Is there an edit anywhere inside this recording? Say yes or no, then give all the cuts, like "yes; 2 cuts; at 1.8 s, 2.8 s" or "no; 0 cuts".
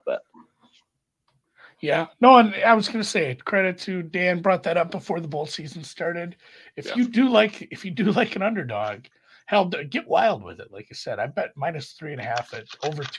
no; 0 cuts